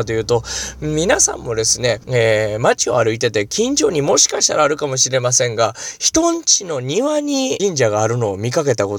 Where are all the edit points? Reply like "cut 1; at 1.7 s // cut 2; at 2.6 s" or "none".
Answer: cut 1; at 2.0 s // cut 2; at 7.6 s